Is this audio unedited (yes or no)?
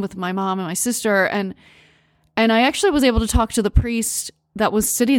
yes